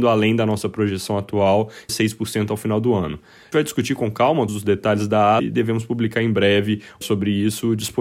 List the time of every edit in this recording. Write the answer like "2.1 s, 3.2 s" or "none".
1.9 s, 3.5 s, 4.5 s, 5.4 s, 7.0 s

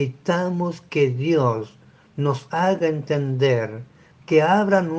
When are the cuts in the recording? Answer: none

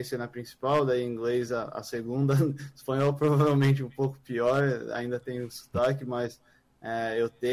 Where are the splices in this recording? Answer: none

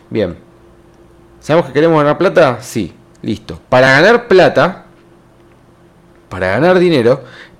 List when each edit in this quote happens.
none

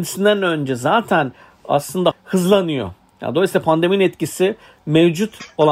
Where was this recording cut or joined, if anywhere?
2.1 s

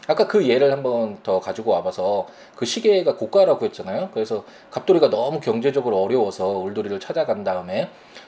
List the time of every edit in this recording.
none

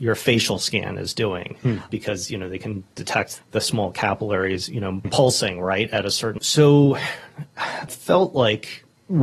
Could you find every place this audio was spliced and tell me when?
3.4 s, 5.0 s, 6.4 s, 7.9 s

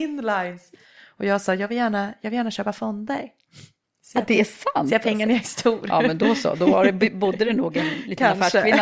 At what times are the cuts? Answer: none

